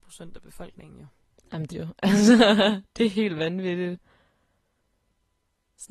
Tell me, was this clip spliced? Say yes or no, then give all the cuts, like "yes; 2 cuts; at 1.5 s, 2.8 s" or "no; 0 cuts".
yes; 1 cut; at 1.7 s